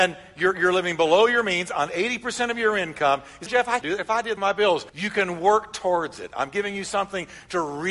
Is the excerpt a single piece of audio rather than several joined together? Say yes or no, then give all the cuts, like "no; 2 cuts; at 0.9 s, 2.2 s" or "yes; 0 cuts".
no; 4 cuts; at 3.5 s, 3.8 s, 4.4 s, 4.9 s